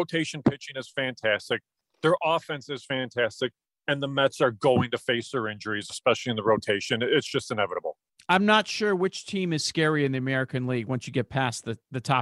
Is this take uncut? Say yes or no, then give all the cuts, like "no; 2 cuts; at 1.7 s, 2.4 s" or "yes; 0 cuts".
yes; 0 cuts